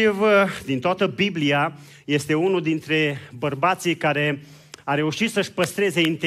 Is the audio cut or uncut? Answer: uncut